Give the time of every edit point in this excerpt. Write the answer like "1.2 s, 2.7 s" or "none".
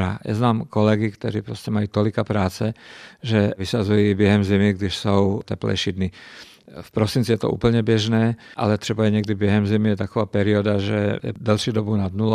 none